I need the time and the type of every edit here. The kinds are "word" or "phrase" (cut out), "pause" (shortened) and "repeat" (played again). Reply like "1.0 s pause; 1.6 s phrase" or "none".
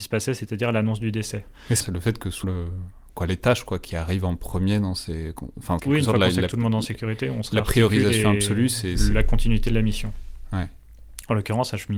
1.8 s word; 2.4 s word; 5.8 s word